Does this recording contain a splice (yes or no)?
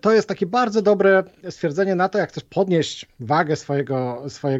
no